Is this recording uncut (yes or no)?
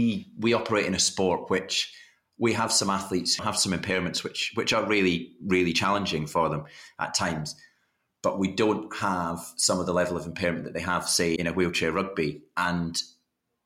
no